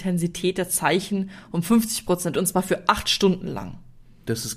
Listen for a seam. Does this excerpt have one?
yes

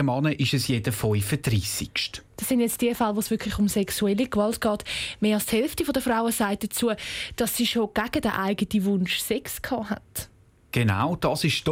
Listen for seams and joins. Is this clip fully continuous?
yes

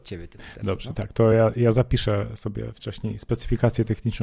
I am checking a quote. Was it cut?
no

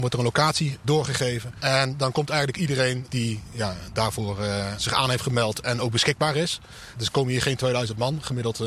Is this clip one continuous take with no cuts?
yes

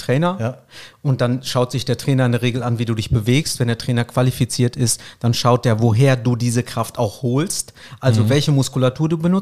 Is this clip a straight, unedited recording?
yes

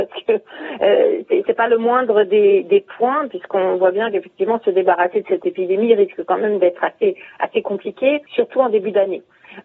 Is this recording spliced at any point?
yes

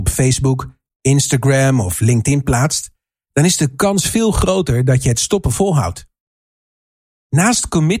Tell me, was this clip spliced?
no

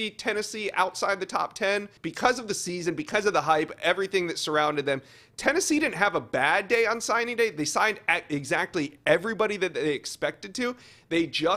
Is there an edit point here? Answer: yes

